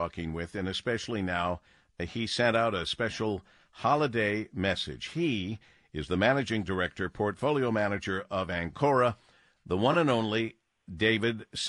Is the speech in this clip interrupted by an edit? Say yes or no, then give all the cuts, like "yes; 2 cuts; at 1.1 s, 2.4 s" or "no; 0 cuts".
no; 0 cuts